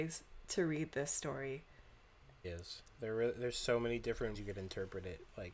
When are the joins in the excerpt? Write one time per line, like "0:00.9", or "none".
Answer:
0:02.4
0:04.3